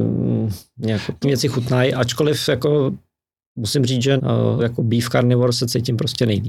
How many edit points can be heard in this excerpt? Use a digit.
3